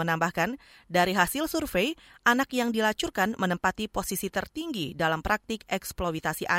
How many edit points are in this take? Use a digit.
0